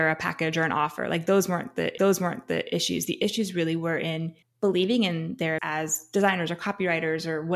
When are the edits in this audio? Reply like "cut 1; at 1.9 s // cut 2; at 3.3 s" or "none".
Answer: cut 1; at 2.0 s // cut 2; at 4.4 s // cut 3; at 5.6 s